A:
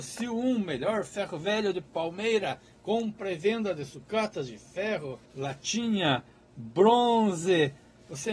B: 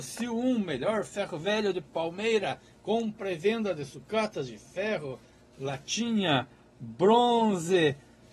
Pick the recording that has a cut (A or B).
A